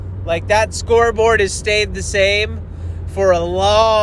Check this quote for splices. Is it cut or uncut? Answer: uncut